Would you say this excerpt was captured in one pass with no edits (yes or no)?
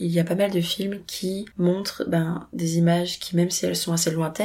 no